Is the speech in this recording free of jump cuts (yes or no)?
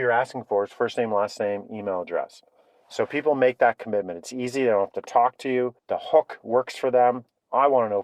no